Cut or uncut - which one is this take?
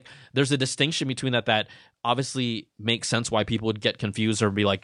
uncut